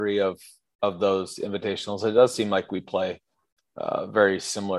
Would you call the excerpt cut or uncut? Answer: uncut